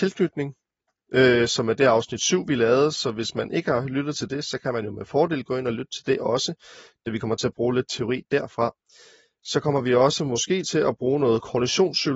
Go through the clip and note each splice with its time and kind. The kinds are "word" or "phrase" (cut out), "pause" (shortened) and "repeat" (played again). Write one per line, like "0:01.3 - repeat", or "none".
none